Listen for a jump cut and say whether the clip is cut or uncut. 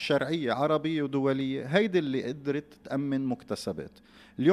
uncut